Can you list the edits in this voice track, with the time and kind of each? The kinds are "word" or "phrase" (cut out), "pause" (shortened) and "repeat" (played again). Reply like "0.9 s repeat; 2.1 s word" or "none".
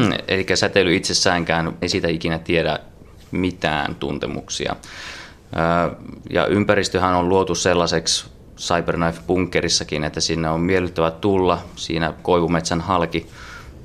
1.8 s word; 12.2 s word